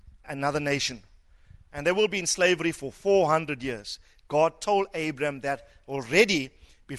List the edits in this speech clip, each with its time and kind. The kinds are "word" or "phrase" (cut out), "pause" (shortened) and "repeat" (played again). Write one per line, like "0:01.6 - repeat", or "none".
none